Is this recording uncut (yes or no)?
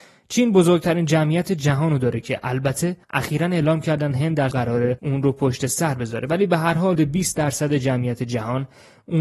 no